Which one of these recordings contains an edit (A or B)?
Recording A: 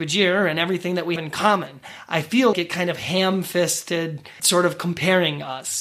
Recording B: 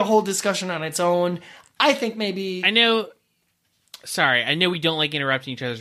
A